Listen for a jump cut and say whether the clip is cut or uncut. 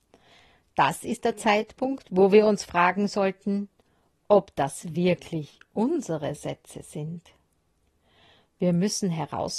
uncut